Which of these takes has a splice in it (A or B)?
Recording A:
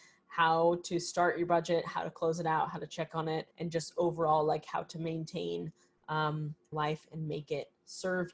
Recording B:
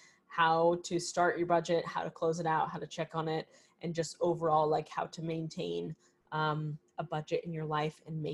A